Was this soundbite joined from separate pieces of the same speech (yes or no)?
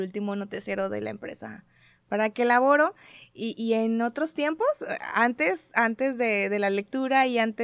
no